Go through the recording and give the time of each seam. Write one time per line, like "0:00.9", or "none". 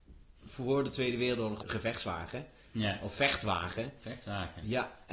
0:01.6